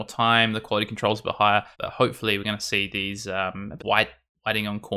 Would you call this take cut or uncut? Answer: cut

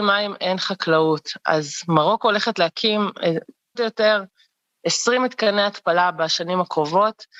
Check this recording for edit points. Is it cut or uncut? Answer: cut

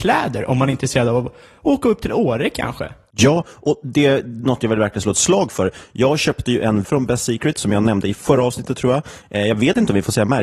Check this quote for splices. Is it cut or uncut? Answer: cut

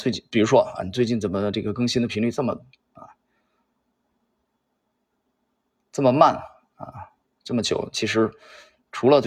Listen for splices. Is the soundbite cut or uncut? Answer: uncut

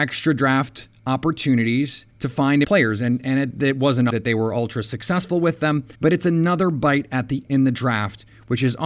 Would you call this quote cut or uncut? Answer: cut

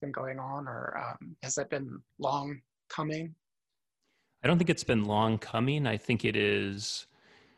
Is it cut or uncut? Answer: cut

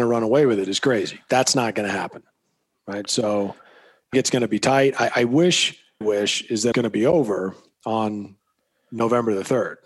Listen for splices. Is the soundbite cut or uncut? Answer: cut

